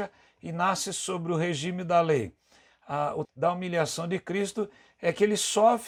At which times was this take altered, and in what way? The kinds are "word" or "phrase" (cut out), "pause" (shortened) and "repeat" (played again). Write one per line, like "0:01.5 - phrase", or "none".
0:03.2 - phrase